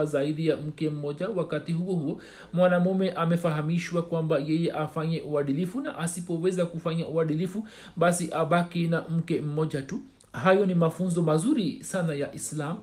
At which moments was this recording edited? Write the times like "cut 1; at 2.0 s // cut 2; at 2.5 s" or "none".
cut 1; at 10.2 s